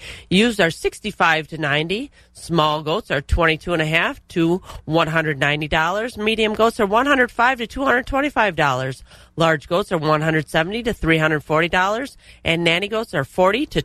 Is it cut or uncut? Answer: uncut